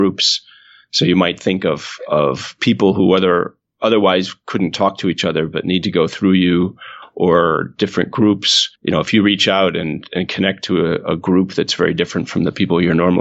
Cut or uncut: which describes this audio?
cut